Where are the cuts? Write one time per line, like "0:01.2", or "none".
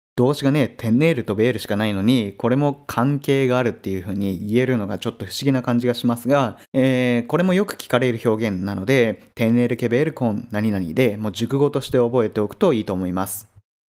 0:06.6